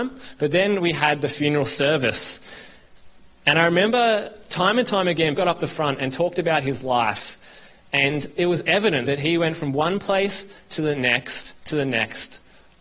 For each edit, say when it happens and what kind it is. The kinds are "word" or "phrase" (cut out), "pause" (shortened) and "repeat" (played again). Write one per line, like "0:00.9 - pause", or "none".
0:05.3 - word
0:09.0 - phrase